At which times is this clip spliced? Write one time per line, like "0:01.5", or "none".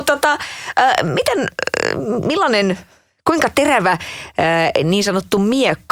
none